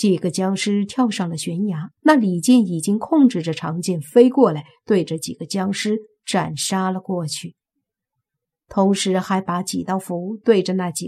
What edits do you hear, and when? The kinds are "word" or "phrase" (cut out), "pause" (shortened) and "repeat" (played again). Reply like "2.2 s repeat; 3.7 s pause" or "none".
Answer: 2.0 s pause